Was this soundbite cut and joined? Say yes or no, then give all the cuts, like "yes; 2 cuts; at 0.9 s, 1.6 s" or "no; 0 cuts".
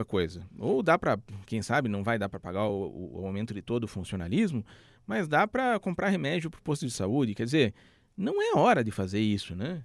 no; 0 cuts